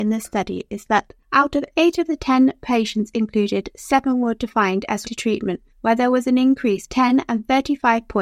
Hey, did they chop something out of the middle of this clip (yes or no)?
yes